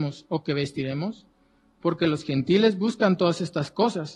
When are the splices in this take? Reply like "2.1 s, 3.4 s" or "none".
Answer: none

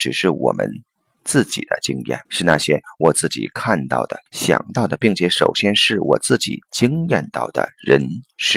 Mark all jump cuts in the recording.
2.3 s, 4.3 s

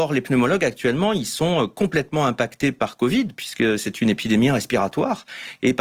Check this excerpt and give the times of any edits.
none

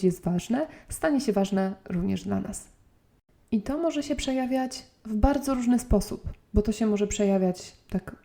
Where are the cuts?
none

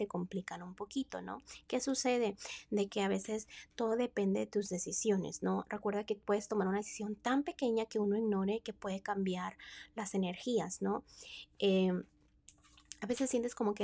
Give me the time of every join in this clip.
none

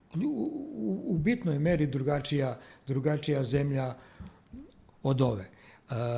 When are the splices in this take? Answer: none

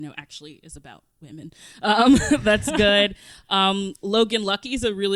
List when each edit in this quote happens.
none

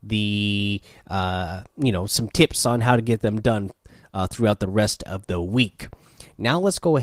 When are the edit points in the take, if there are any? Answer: none

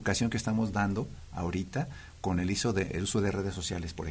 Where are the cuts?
none

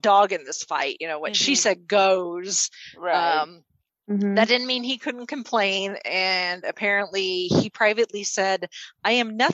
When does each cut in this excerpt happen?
none

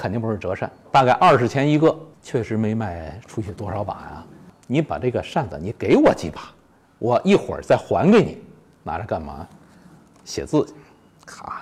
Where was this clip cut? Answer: none

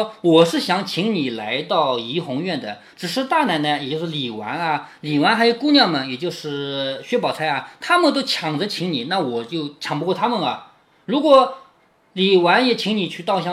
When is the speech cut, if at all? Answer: none

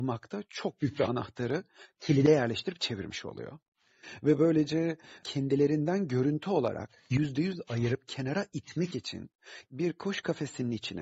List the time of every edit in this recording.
5.2 s, 9.7 s

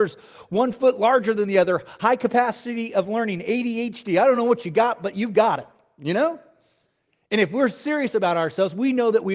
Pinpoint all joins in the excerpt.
none

